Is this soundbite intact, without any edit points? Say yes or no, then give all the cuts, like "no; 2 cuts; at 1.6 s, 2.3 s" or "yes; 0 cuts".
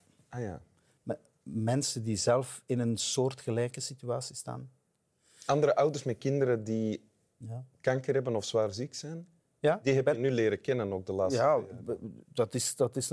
yes; 0 cuts